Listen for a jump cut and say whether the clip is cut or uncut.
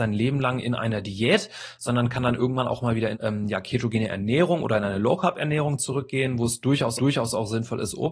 cut